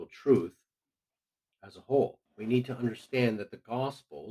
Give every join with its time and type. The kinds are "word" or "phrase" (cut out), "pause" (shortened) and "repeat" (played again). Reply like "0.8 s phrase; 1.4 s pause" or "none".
2.3 s pause